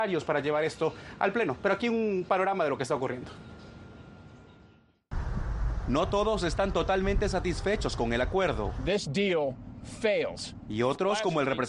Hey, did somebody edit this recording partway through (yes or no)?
no